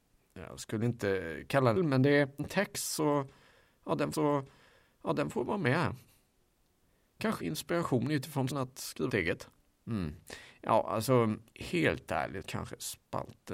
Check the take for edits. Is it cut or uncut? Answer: cut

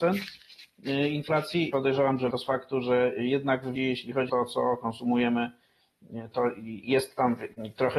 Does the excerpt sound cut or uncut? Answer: cut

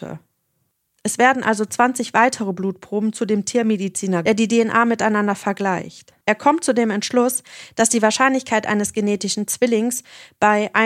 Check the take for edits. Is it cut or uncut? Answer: cut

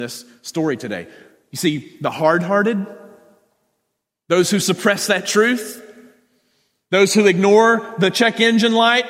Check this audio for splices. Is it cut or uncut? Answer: uncut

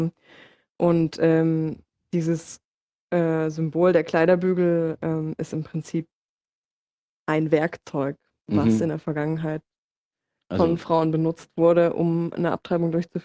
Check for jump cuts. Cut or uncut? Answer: uncut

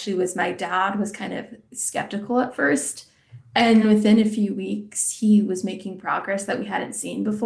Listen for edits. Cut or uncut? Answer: cut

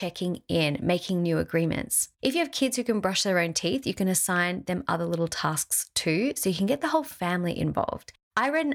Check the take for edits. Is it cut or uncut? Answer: uncut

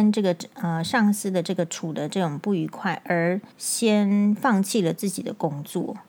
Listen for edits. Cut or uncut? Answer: cut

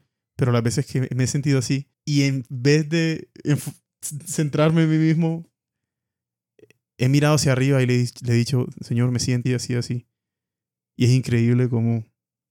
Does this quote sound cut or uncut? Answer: cut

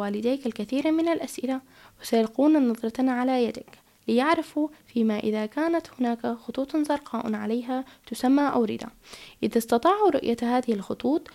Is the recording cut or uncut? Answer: uncut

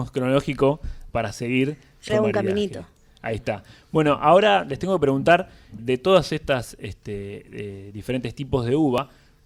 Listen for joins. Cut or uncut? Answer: cut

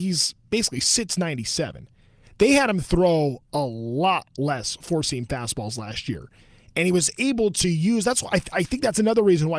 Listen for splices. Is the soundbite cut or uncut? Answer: uncut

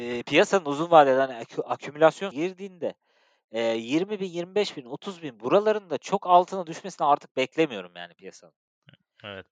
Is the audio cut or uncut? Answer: cut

